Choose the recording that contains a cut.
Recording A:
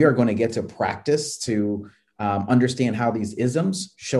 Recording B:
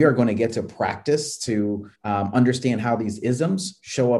B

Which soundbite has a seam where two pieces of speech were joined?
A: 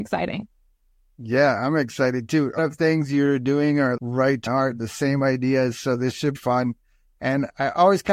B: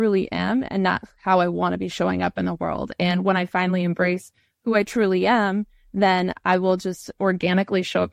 A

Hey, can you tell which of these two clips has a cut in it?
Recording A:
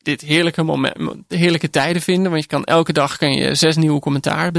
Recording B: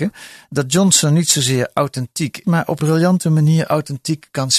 B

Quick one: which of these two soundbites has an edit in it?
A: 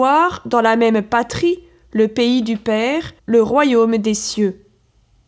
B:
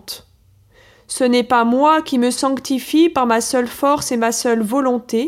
A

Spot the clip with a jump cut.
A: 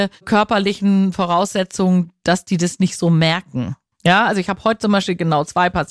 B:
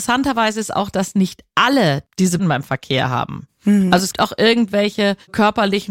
B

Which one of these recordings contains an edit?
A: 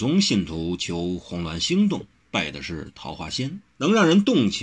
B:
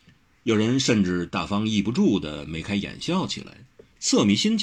A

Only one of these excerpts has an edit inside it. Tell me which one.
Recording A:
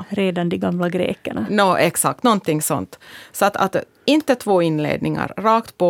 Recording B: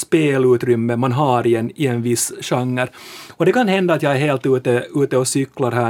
A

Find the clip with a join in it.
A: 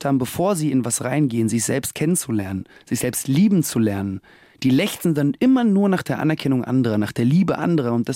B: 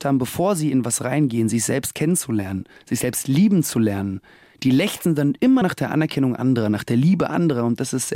B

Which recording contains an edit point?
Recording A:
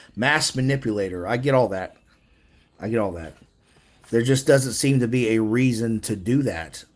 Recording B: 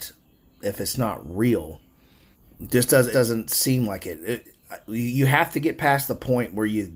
B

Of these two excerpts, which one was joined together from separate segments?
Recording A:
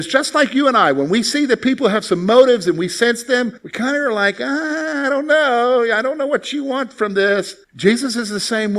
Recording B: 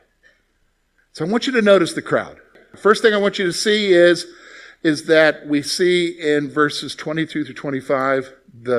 A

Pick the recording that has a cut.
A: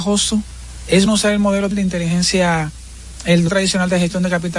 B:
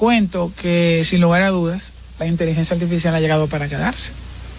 A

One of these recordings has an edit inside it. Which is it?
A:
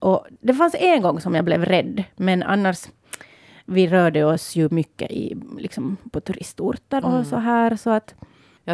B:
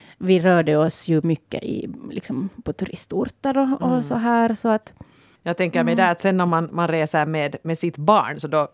A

